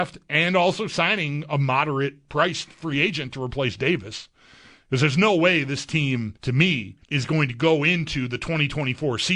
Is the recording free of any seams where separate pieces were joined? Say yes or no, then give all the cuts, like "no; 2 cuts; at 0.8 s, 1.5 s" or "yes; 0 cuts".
no; 2 cuts; at 6.4 s, 7.0 s